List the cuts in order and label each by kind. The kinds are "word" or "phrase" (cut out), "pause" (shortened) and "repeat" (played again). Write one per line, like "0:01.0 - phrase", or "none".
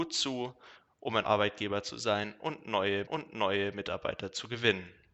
0:01.2 - word
0:03.1 - repeat